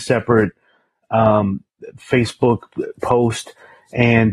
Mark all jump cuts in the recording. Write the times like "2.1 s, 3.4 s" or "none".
3.0 s